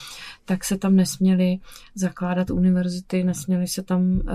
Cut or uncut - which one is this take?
uncut